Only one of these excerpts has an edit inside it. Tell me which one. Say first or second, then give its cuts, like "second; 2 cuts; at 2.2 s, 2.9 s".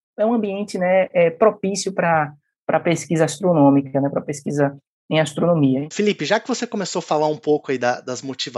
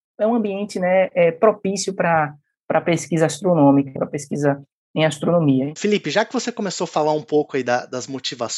second; 1 cut; at 4.0 s